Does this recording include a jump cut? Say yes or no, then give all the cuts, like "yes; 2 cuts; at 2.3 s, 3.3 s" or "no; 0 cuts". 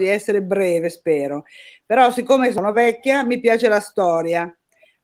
no; 0 cuts